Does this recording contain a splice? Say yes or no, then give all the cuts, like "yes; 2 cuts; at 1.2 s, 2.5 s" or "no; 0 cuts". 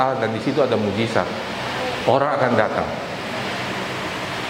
no; 0 cuts